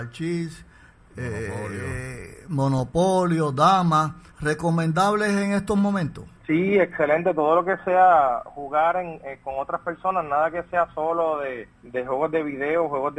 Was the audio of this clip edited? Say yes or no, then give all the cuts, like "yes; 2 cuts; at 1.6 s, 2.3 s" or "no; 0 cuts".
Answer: yes; 3 cuts; at 4.3 s, 6.4 s, 11.7 s